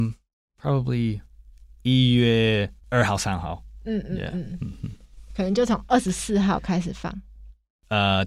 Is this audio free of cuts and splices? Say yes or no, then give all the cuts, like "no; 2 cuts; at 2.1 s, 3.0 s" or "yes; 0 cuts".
no; 1 cut; at 2.8 s